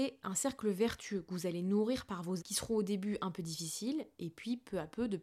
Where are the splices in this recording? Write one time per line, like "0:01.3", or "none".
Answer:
0:02.4

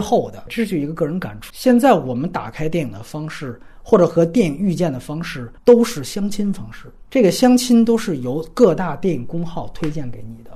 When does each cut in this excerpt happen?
0:01.5

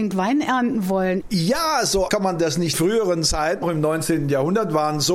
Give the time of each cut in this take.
0:02.1
0:02.7
0:03.6

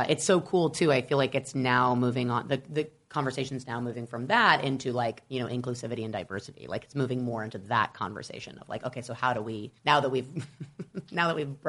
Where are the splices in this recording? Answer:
0:09.8

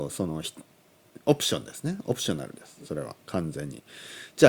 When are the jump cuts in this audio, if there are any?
0:03.2

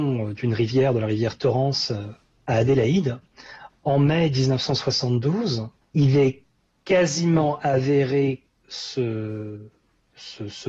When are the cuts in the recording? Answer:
0:08.6

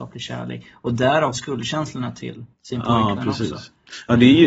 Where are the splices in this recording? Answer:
0:01.3
0:02.5

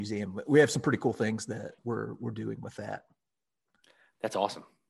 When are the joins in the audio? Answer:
0:01.8

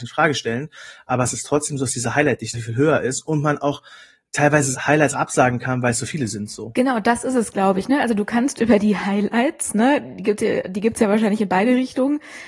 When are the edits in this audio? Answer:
0:02.5
0:04.7
0:05.1

